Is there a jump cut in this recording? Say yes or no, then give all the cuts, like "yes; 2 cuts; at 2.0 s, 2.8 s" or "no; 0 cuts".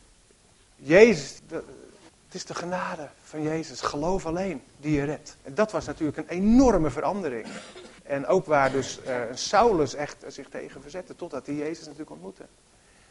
yes; 5 cuts; at 1.4 s, 2.1 s, 5.4 s, 8.0 s, 10.2 s